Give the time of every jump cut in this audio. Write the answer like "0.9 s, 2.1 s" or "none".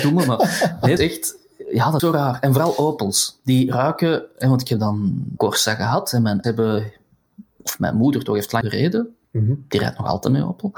1.0 s, 2.0 s, 5.4 s, 6.4 s, 8.6 s, 9.2 s

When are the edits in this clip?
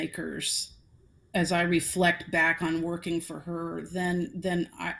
none

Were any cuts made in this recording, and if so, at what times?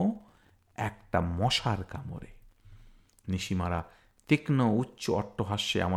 none

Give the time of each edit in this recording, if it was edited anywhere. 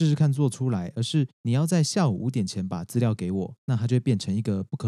1.3 s

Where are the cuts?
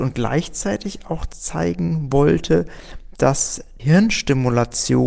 3.8 s

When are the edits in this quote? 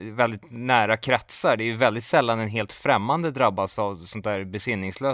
none

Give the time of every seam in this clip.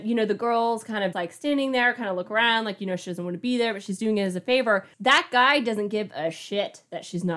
1.1 s, 4.9 s

